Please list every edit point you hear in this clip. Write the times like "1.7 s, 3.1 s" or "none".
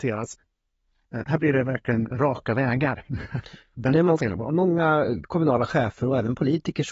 2.1 s